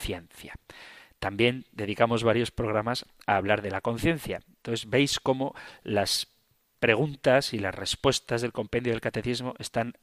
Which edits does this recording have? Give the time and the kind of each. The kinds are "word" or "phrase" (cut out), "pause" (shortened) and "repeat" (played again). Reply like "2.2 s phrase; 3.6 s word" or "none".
none